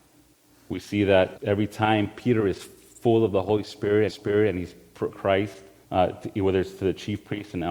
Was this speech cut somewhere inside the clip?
yes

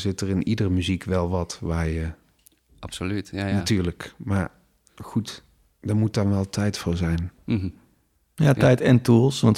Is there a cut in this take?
no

